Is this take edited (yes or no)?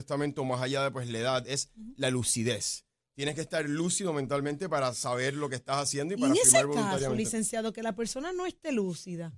no